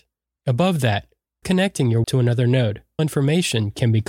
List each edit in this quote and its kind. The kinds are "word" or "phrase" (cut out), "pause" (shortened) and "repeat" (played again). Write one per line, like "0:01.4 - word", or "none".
0:01.4 - word
0:02.0 - word
0:03.0 - word

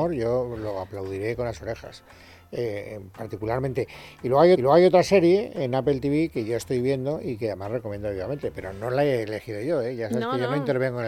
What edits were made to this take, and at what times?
0:04.5 - repeat

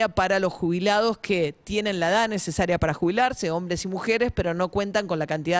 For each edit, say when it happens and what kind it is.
none

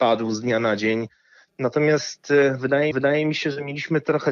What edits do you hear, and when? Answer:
0:02.9 - repeat

